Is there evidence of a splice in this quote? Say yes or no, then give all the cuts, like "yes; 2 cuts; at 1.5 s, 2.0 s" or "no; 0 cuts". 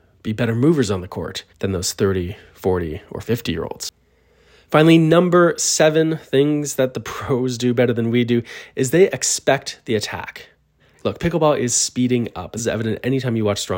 yes; 3 cuts; at 1.5 s, 10.8 s, 12.6 s